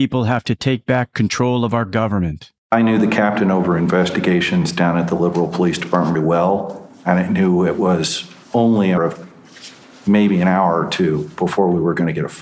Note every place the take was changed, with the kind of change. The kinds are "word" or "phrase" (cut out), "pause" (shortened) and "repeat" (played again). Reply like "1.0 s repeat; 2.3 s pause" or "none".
2.6 s pause; 6.1 s word; 8.4 s pause; 9.0 s word